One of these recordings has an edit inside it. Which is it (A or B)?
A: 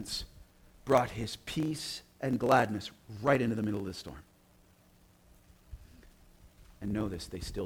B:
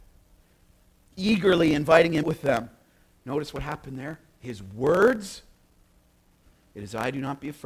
B